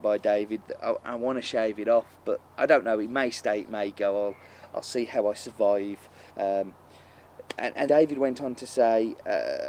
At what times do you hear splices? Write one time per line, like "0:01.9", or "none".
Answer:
0:01.0
0:02.5
0:06.3
0:07.9